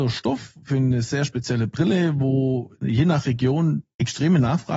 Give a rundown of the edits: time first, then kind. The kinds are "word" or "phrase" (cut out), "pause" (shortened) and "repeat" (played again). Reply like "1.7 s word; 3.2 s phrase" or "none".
2.7 s pause